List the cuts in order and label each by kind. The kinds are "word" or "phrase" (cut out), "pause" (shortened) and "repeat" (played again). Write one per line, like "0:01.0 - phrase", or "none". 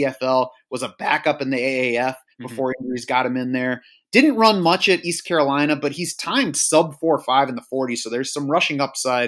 none